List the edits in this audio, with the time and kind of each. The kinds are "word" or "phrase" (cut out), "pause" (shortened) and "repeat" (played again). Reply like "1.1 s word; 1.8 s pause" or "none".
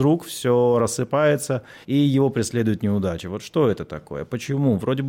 1.8 s pause